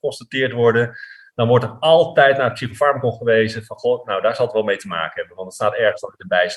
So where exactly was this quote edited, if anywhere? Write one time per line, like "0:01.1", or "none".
none